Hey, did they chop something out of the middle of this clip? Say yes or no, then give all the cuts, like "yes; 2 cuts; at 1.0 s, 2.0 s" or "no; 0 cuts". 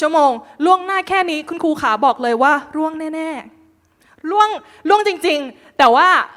no; 0 cuts